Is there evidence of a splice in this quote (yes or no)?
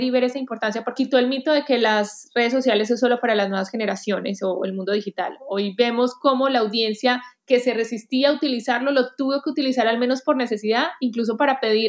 yes